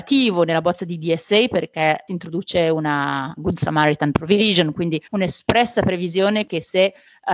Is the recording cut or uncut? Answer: cut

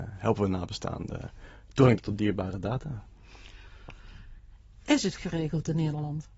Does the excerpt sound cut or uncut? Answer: cut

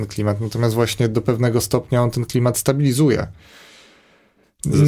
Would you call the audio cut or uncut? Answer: uncut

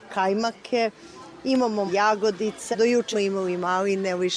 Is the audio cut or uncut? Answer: cut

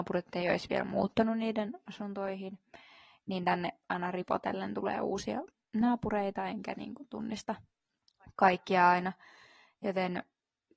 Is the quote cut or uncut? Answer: uncut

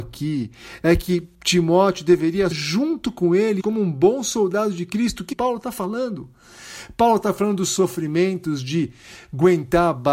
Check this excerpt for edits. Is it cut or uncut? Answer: cut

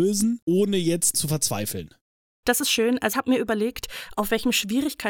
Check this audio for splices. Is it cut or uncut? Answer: cut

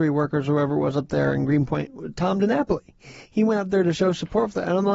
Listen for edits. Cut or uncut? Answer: uncut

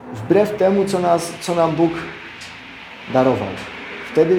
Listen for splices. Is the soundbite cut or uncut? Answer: uncut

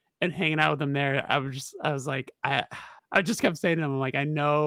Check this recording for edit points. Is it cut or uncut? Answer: cut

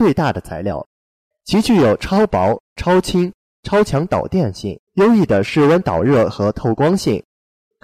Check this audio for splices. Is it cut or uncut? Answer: cut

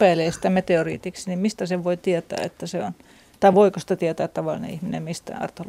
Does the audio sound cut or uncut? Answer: uncut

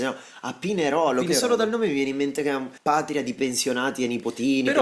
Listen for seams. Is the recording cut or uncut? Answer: cut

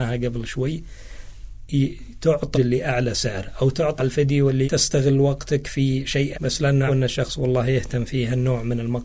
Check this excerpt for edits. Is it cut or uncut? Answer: cut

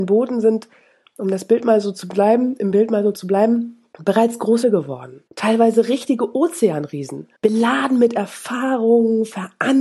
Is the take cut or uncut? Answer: cut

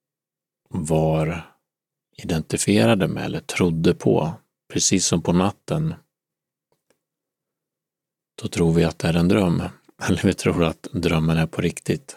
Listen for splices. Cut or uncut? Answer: uncut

